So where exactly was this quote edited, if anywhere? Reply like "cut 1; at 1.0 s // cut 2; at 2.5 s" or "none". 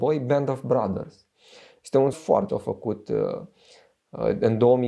cut 1; at 2.1 s // cut 2; at 2.5 s